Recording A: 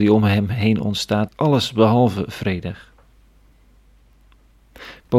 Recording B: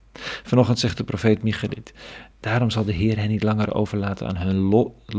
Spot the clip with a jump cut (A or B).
A